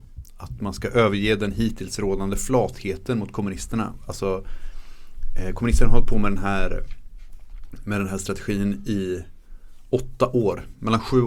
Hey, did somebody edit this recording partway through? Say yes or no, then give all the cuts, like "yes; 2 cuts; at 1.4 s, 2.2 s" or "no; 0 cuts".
no; 0 cuts